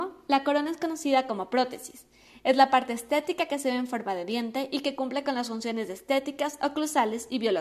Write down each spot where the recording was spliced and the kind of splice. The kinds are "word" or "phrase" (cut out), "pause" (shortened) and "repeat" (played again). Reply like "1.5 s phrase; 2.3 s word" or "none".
none